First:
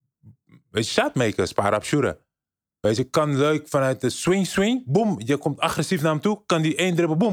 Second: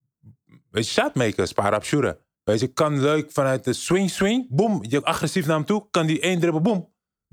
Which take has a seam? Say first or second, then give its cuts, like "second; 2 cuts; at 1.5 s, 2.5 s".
second; 2 cuts; at 2.4 s, 5.0 s